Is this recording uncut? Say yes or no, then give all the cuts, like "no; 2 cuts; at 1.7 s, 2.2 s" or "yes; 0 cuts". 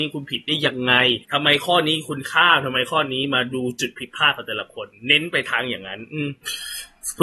no; 1 cut; at 1.2 s